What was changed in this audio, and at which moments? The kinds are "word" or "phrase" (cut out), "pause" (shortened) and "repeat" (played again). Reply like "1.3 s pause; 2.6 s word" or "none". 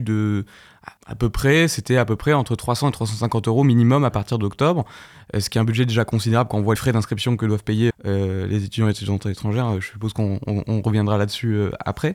1.0 s word; 6.8 s word; 7.9 s word